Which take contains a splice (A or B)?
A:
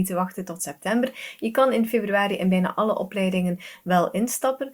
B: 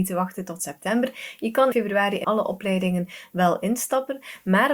B